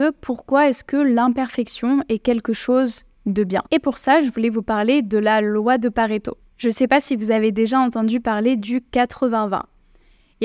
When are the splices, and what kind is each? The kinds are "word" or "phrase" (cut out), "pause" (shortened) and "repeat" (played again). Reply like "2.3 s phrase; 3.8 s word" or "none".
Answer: 3.1 s pause; 3.7 s pause; 6.4 s pause